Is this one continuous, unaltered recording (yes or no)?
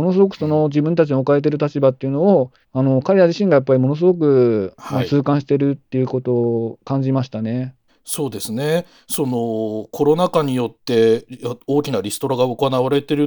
no